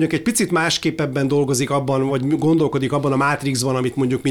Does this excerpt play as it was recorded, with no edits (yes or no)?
yes